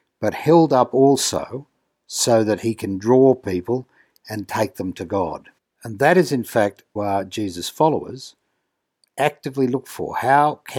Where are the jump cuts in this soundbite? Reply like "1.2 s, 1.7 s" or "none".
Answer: 5.6 s, 7.0 s